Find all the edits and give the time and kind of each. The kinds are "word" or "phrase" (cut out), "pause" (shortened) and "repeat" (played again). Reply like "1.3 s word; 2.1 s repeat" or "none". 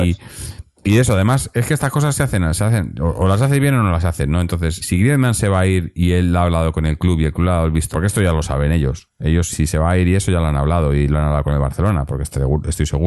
4.8 s word; 7.9 s word; 9.5 s word